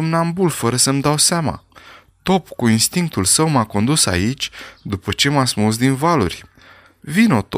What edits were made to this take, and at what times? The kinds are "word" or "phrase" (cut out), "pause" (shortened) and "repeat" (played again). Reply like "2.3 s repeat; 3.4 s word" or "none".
none